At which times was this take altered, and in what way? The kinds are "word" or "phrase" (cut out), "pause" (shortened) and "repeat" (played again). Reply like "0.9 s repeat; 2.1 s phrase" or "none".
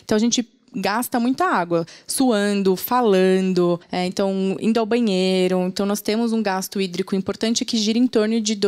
3.8 s pause